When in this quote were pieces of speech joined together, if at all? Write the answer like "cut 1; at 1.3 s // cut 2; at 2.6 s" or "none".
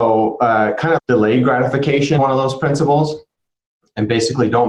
cut 1; at 1.0 s // cut 2; at 2.2 s